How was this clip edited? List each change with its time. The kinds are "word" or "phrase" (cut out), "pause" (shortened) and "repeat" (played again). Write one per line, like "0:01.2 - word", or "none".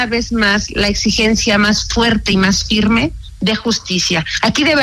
none